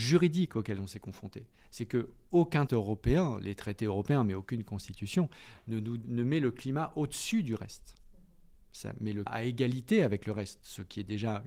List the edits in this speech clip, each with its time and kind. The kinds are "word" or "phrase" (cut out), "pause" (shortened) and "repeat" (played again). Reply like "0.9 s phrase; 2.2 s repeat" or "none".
2.7 s word; 6.0 s word; 9.3 s word